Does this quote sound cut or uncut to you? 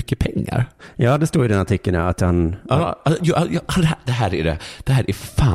uncut